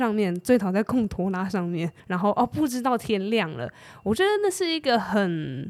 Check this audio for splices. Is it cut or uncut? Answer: cut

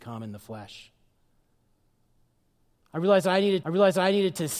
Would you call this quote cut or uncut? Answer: cut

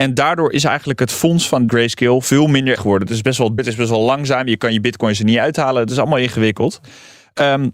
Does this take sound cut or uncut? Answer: cut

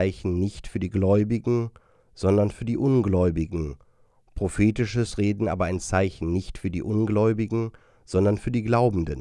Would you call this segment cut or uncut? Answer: uncut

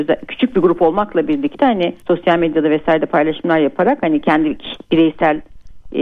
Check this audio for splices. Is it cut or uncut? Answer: cut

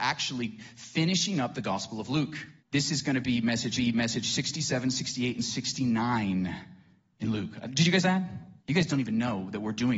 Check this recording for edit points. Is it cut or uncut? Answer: cut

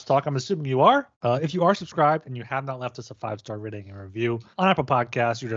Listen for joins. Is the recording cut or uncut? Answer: cut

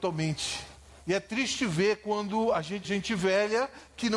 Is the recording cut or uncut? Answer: cut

